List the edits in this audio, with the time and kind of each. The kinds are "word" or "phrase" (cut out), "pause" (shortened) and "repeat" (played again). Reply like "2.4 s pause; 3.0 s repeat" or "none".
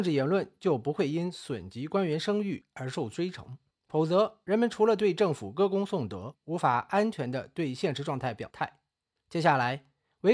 3.7 s pause